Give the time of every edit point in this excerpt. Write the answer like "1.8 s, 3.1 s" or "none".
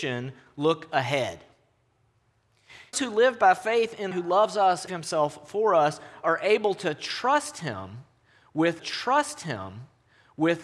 2.9 s, 4.1 s, 4.9 s, 8.8 s